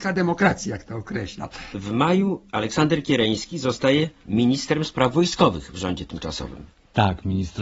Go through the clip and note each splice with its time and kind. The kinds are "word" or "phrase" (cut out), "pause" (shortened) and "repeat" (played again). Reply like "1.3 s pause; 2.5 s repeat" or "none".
none

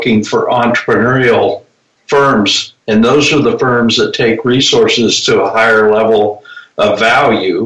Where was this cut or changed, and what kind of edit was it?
2.8 s pause

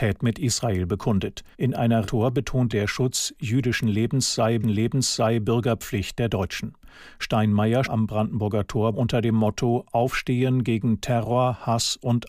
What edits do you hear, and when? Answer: 1.5 s pause; 2.0 s phrase; 2.7 s word; 4.6 s repeat; 7.8 s word; 8.9 s phrase

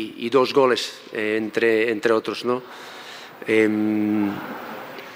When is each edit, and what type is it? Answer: none

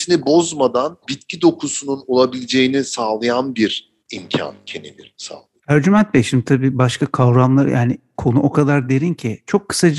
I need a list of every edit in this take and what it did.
1.0 s pause; 4.0 s pause; 5.6 s pause

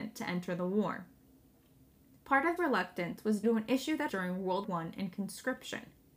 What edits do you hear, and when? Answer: 2.6 s word; 3.4 s word; 4.1 s word; 4.6 s word

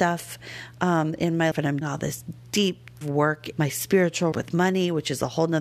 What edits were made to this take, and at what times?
1.5 s word; 1.8 s word; 3.0 s word; 3.5 s word; 4.3 s word

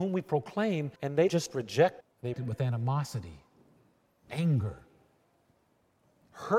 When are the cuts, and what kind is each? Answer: 1.0 s pause; 1.3 s word; 2.0 s word; 2.3 s word

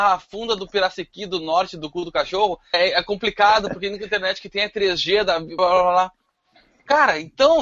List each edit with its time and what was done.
2.7 s word; 5.6 s word

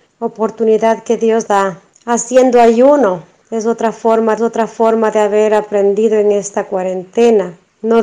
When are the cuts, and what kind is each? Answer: 1.5 s word; 4.4 s repeat

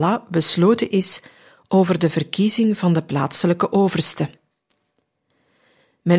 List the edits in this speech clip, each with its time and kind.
none

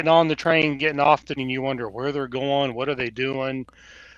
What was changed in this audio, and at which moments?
1.4 s word

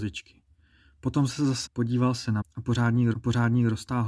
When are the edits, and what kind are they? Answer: 1.7 s word; 2.4 s word; 3.1 s repeat

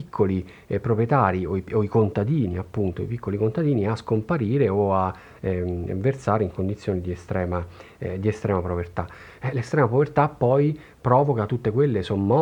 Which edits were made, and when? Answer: none

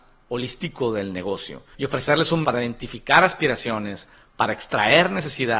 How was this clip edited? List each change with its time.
1.7 s word; 2.4 s word

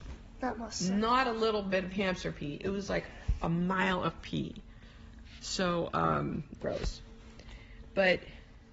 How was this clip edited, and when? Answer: 6.6 s phrase

